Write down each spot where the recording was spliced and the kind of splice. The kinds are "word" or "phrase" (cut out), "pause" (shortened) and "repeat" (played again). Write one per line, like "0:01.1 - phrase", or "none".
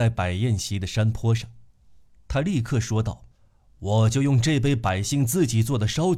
0:03.3 - pause